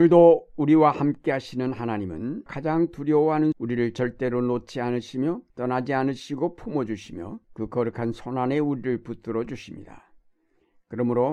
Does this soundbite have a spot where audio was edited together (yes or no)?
yes